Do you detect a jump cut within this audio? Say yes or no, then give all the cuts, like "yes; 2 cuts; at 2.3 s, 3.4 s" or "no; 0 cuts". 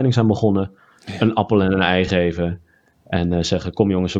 no; 0 cuts